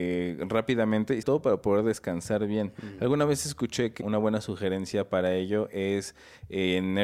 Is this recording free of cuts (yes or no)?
no